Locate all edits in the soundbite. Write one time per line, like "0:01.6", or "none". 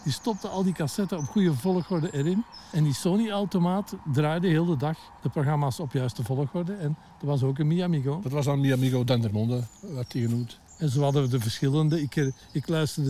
none